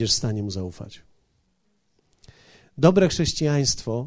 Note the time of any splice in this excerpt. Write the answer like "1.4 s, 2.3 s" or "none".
none